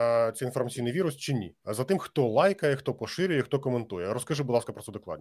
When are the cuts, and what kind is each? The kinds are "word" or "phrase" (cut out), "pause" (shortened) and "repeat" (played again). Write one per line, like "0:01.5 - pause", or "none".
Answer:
0:01.6 - pause